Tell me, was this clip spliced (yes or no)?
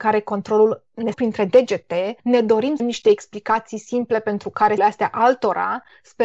yes